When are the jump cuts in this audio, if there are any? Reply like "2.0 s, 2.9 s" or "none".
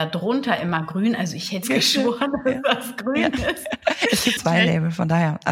1.6 s, 4.4 s